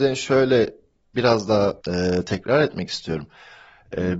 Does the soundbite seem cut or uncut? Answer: cut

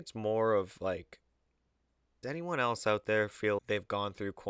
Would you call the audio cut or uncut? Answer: cut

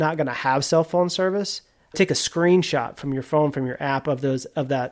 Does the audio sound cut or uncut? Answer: cut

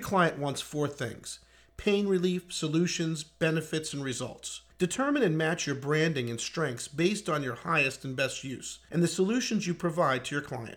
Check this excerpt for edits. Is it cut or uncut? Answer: uncut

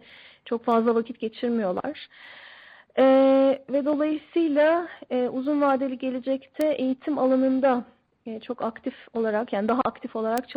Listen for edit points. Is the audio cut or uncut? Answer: uncut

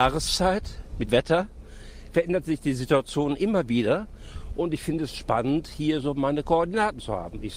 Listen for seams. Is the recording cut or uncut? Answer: cut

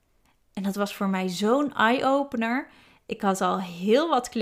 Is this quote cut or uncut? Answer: uncut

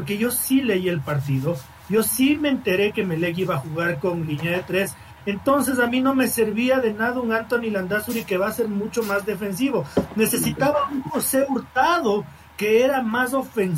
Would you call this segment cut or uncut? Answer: uncut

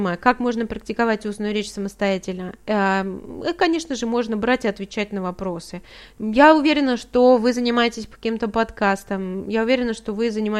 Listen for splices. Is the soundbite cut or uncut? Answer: uncut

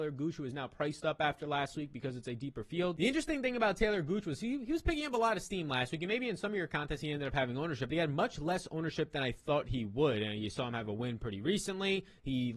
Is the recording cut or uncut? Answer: uncut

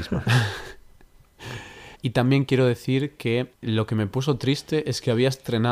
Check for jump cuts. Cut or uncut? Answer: cut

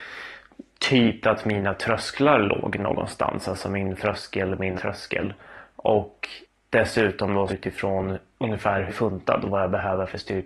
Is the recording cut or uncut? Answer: cut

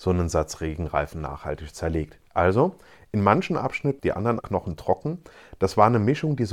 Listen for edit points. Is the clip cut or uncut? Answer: cut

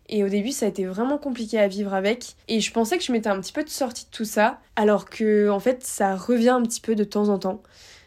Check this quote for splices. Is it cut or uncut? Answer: cut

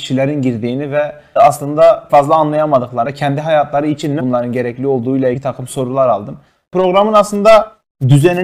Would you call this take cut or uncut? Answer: cut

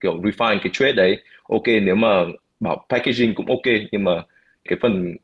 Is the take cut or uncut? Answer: uncut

